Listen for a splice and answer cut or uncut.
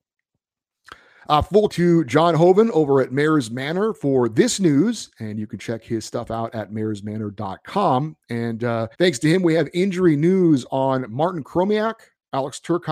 cut